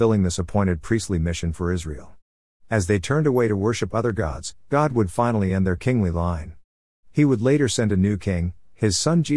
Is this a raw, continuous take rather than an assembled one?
yes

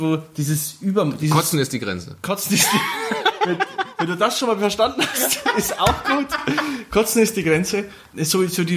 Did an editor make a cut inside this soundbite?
no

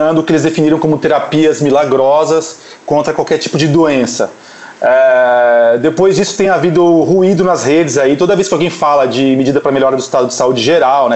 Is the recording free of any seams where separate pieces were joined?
yes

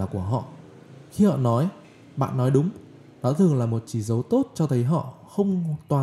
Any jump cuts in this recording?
no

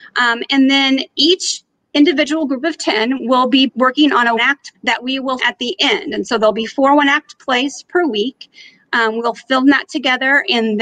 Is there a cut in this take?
yes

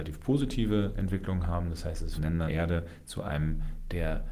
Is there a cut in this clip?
yes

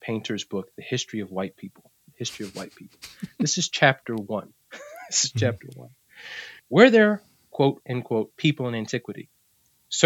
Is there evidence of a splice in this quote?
yes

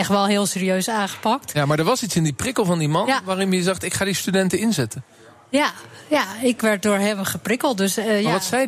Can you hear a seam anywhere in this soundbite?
yes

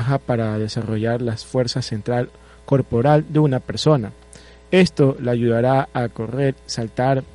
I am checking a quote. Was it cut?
no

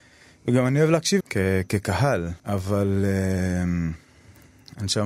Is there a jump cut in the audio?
yes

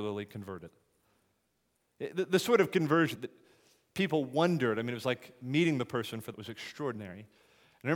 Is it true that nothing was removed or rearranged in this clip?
no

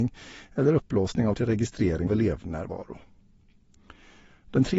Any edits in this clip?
yes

